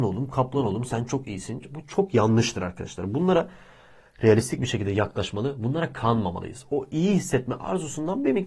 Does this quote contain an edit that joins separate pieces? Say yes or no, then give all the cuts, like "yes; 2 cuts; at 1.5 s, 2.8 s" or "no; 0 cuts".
no; 0 cuts